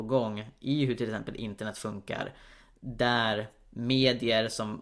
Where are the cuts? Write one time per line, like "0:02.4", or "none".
none